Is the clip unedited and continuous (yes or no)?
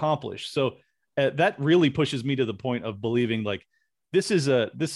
yes